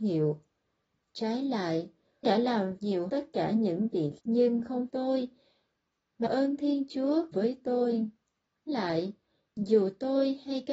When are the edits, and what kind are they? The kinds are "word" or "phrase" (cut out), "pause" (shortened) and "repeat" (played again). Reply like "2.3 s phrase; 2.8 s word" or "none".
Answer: 2.2 s word; 2.8 s word; 3.1 s word; 4.2 s word; 4.9 s word; 6.2 s word; 7.3 s word; 8.7 s word